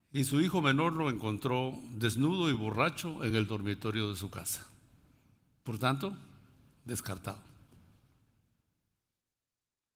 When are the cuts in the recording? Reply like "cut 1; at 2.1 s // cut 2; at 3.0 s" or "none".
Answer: none